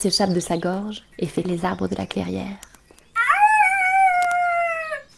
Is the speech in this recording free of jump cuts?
no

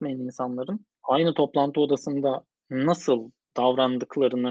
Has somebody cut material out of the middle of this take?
yes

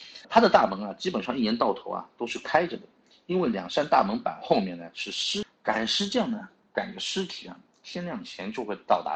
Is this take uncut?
yes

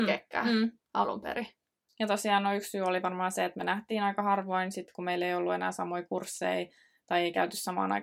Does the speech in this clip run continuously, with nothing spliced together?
yes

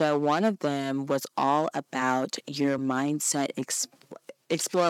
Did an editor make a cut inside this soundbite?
no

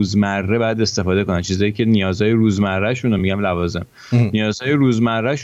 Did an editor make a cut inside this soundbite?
no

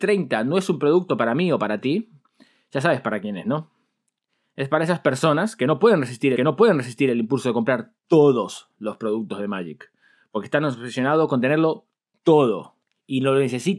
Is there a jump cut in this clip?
yes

